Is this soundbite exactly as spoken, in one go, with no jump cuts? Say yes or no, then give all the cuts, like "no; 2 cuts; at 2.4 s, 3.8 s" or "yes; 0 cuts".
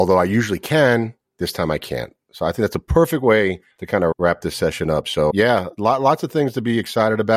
no; 3 cuts; at 3.7 s, 4.1 s, 5.3 s